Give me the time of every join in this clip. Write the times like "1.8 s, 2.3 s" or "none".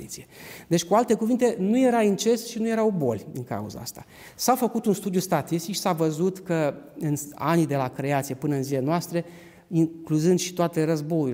none